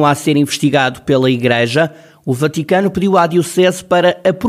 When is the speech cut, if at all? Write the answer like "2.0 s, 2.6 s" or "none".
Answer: none

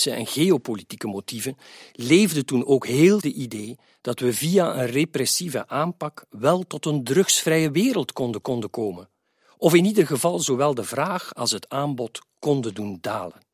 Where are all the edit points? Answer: 3.2 s, 8.4 s

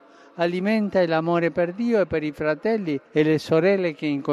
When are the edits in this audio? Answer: 3.1 s

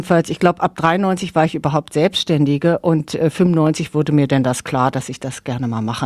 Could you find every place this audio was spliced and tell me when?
none

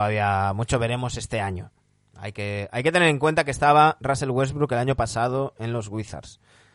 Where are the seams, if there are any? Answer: none

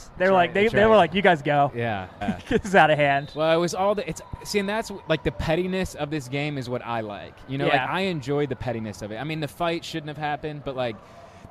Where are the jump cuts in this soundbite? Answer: 2.2 s

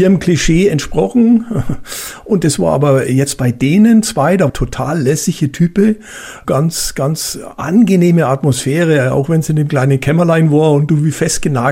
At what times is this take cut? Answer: 4.5 s

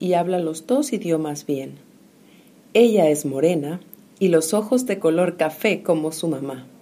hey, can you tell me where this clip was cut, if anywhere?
4.2 s

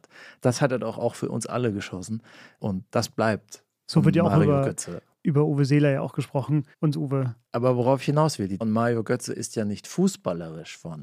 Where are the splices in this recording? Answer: 2.9 s, 6.7 s, 8.6 s

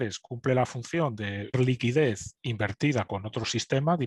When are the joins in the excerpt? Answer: 1.5 s

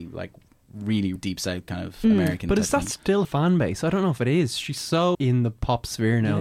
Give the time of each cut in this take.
1.2 s, 3.2 s, 5.1 s

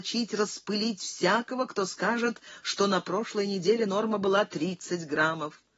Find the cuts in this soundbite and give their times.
none

